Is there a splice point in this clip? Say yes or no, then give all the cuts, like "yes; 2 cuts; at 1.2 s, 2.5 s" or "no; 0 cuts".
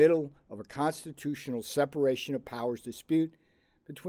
no; 0 cuts